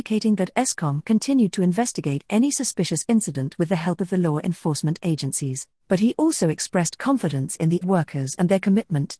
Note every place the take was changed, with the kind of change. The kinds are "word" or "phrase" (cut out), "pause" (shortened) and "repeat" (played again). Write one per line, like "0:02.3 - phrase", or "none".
0:05.8 - pause
0:07.8 - phrase